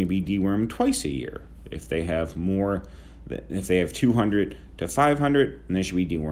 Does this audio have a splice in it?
no; 0 cuts

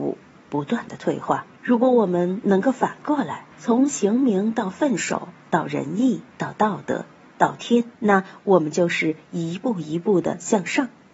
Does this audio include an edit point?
yes; 3 cuts; at 1.5 s, 3.5 s, 7.9 s

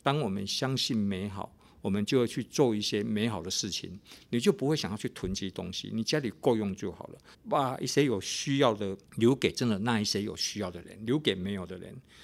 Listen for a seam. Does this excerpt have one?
yes; 2 cuts; at 7.3 s, 9.1 s

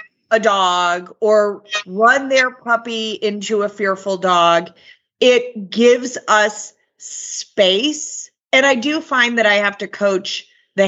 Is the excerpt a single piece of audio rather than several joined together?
yes; 0 cuts

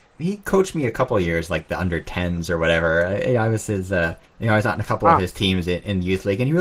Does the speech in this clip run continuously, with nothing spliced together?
no; 1 cut; at 4.3 s

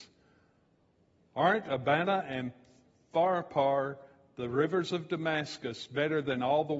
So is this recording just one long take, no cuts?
yes; 0 cuts

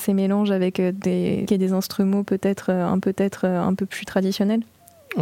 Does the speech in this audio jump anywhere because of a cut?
yes; 2 cuts; at 1.5 s, 3.0 s

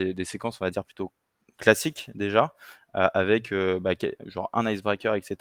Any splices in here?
no; 0 cuts

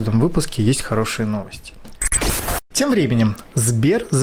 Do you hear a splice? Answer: no; 0 cuts

